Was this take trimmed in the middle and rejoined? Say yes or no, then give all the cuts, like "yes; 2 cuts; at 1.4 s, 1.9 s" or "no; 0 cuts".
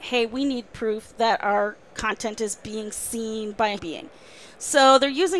yes; 1 cut; at 3.8 s